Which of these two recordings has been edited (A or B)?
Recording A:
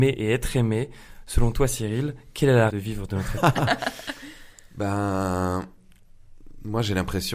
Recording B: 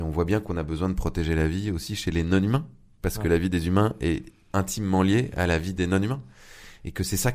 A